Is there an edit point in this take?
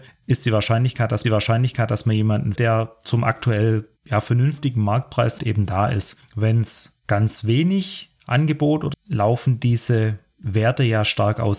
yes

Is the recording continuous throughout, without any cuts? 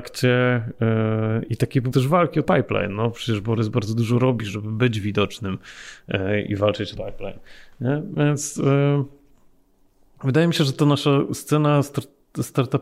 no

